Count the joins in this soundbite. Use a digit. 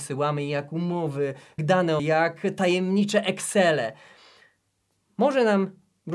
2